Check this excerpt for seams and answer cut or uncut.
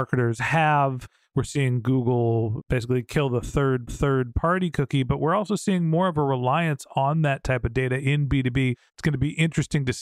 cut